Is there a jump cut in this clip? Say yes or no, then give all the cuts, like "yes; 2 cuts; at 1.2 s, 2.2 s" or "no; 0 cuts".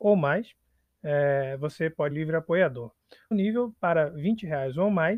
yes; 2 cuts; at 2.1 s, 3.3 s